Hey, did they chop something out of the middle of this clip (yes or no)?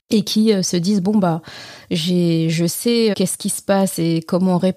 yes